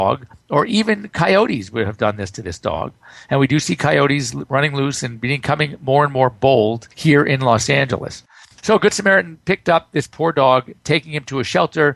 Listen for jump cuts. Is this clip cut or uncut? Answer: uncut